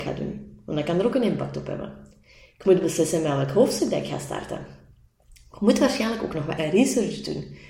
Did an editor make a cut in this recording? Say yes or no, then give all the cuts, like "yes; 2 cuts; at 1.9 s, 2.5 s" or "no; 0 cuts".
yes; 1 cut; at 6.6 s